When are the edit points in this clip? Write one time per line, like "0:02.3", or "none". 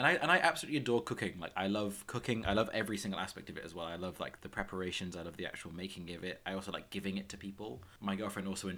0:04.4